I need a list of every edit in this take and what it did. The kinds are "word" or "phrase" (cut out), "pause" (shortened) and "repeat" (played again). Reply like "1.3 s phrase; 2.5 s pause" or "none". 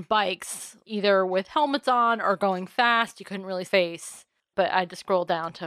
3.7 s phrase